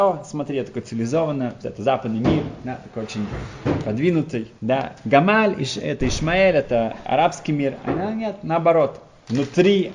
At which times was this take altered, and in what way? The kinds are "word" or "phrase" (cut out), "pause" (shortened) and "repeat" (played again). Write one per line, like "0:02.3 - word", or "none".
0:01.6 - phrase
0:04.6 - pause